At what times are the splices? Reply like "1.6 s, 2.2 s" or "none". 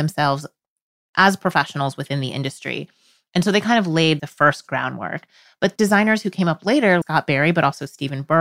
4.2 s, 5.8 s, 7.0 s